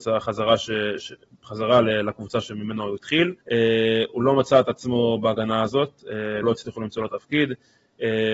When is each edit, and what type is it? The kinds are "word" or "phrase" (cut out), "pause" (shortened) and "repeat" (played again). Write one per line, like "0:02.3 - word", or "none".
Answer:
0:03.4 - pause
0:06.4 - word